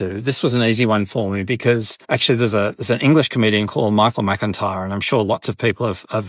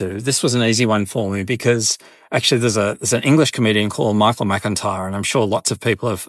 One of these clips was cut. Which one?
first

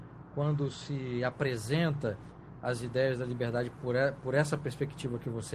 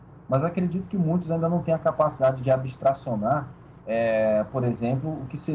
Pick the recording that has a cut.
second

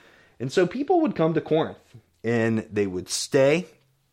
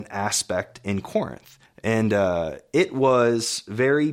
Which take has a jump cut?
second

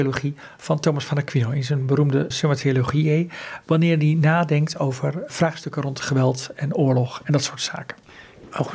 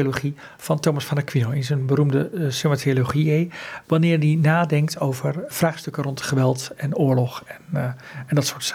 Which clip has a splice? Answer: first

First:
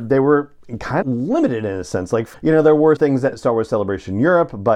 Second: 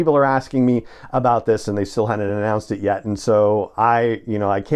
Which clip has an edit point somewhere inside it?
first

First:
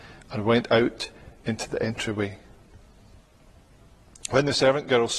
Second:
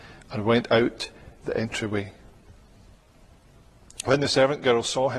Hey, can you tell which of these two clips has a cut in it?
second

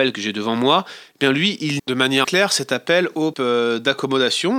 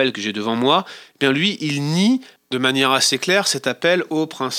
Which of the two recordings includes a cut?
first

